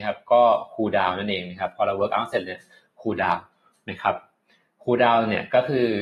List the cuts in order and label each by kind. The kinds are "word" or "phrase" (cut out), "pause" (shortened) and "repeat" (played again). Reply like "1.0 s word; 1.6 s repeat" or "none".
none